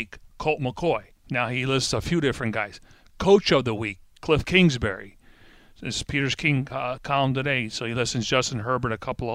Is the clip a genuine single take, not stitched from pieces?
yes; 0 cuts

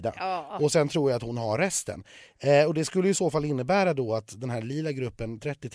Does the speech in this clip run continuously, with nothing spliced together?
yes; 0 cuts

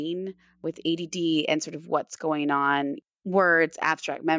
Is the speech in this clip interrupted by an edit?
no; 0 cuts

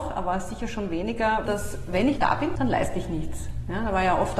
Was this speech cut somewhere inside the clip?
yes; 3 cuts; at 1.5 s, 2.2 s, 2.6 s

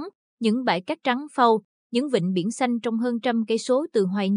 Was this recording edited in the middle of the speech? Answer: no; 0 cuts

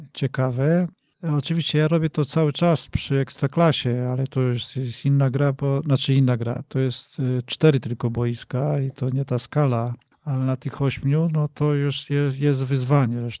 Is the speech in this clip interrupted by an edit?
no; 0 cuts

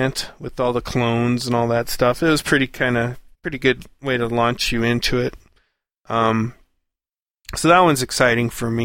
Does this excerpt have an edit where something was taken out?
yes; 1 cut; at 3.3 s

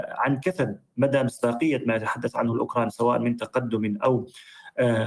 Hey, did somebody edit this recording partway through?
no; 0 cuts

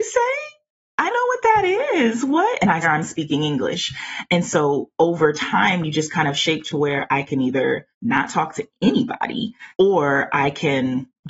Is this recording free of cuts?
no; 4 cuts; at 1.1 s, 2.8 s, 7.9 s, 9.7 s

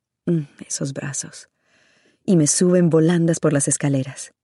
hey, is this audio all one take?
yes; 0 cuts

